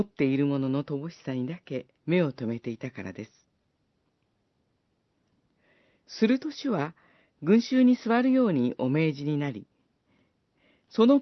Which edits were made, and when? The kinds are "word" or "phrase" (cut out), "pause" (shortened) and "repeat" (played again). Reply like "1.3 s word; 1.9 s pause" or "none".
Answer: 1.9 s pause

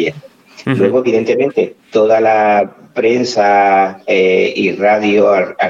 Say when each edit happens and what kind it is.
none

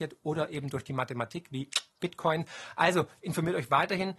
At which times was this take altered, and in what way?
none

